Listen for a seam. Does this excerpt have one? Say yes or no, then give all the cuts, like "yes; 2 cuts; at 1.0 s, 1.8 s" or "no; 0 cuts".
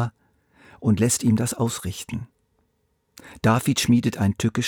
no; 0 cuts